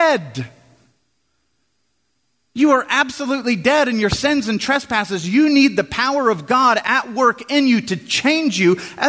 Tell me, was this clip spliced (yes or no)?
no